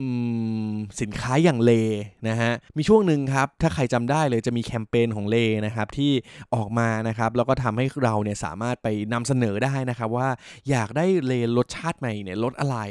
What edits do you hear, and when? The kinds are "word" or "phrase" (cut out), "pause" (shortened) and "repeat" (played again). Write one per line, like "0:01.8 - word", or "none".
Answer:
0:02.7 - pause